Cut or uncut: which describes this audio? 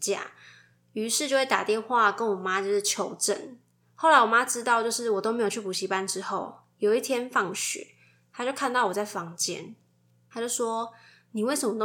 uncut